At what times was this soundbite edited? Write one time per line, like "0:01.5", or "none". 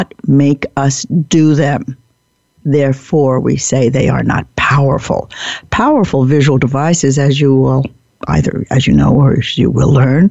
none